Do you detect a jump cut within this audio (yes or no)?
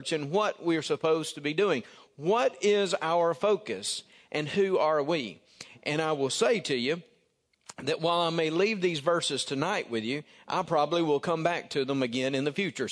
no